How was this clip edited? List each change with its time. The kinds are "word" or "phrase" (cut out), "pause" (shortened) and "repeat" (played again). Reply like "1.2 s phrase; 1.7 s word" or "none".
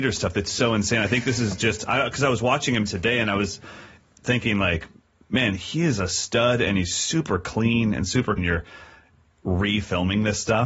8.4 s phrase